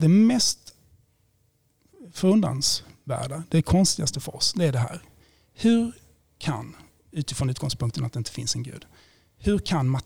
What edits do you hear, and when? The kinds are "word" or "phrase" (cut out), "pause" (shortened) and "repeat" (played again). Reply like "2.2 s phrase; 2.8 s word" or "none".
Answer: none